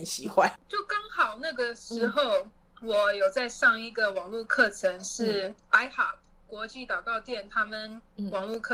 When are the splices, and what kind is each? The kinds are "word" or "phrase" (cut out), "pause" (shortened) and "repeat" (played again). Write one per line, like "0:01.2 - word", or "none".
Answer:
0:05.6 - pause

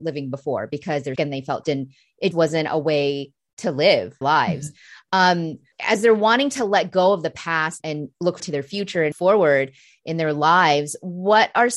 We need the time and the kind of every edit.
0:01.2 - word
0:01.6 - word
0:02.3 - word
0:04.2 - word
0:05.7 - word
0:07.8 - word
0:08.4 - word
0:09.1 - word

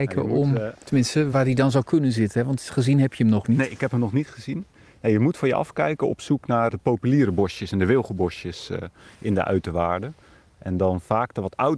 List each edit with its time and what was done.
0:01.3 - word
0:06.7 - word

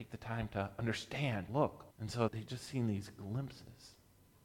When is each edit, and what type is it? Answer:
0:01.5 - word
0:01.9 - pause
0:02.3 - word

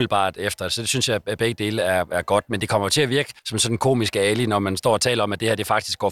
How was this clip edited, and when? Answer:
0:03.4 - pause

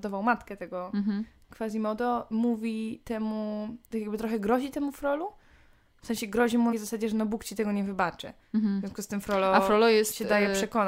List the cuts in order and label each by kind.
0:03.8 - pause
0:06.7 - phrase
0:08.4 - pause

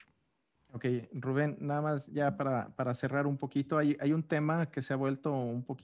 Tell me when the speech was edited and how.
none

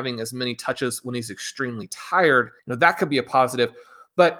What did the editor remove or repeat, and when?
0:02.6 - pause

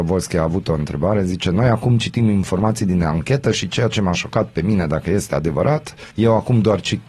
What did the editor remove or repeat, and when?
0:06.1 - pause

